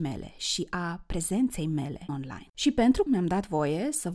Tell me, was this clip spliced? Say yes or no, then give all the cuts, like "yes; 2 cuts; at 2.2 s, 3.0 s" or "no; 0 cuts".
yes; 3 cuts; at 2.1 s, 2.5 s, 3.1 s